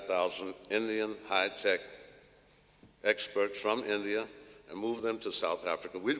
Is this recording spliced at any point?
no; 0 cuts

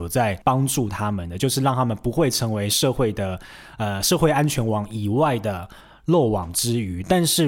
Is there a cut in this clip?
no; 0 cuts

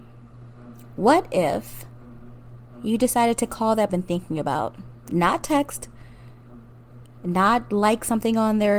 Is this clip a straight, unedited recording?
no; 1 cut; at 3.9 s

